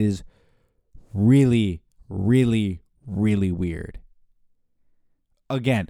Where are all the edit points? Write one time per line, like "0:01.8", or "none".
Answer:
none